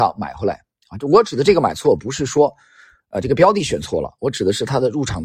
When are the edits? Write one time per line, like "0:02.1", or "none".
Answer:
none